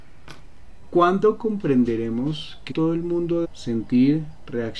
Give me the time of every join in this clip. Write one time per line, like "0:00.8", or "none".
0:02.7
0:03.4